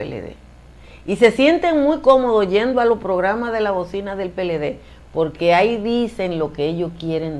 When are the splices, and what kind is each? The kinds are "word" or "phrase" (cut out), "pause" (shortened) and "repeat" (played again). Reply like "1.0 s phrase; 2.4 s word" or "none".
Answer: none